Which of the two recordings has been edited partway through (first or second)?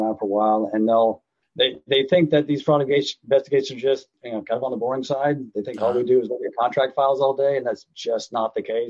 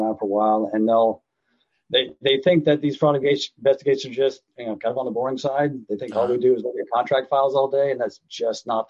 first